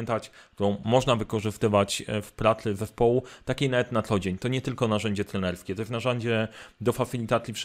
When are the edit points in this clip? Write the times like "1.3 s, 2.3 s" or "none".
none